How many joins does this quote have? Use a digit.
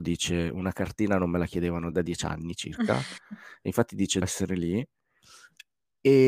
2